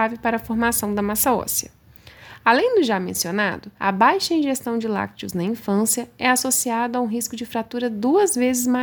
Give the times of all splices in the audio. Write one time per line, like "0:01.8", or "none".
0:03.8